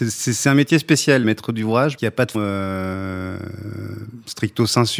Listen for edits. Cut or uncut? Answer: cut